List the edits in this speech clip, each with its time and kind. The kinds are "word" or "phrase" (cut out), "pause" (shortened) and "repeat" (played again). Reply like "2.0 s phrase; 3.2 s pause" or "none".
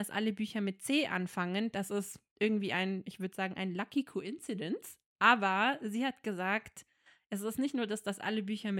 none